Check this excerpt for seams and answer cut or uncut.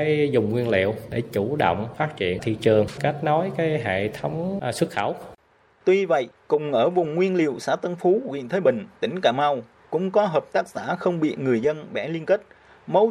uncut